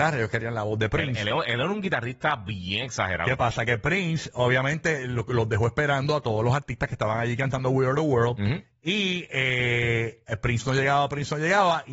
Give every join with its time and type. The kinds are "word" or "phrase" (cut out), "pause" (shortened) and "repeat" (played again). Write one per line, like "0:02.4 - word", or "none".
none